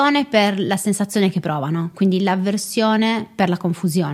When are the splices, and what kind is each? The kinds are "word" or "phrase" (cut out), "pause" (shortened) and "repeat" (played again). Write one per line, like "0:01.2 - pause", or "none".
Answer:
none